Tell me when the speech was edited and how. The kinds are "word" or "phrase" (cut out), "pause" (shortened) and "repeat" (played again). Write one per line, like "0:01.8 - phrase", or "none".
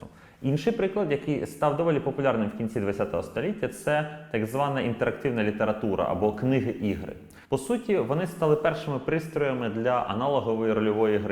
0:07.4 - pause